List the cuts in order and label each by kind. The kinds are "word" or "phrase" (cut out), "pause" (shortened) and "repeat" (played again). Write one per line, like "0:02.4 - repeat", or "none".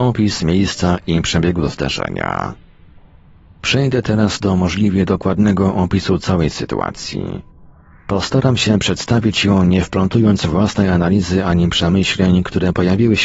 none